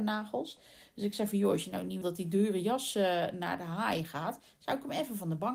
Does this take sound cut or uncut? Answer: cut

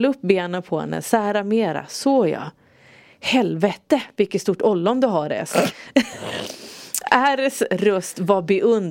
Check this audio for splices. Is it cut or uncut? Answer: uncut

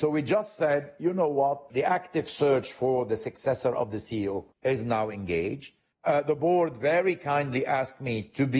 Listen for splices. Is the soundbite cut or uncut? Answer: cut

